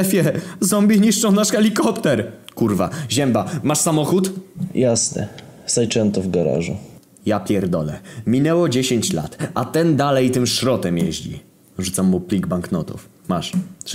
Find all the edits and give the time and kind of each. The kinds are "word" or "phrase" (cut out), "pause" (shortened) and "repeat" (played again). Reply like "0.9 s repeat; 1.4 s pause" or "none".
none